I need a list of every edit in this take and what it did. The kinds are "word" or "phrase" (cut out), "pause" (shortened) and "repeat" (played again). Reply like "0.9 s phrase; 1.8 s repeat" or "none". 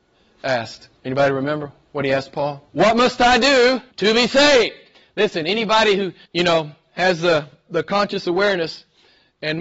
1.0 s pause; 2.7 s pause; 3.9 s pause; 4.9 s pause; 6.2 s pause